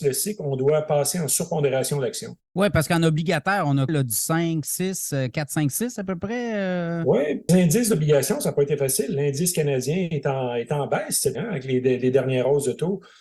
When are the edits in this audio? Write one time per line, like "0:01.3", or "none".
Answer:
0:02.4
0:03.9
0:07.5
0:11.3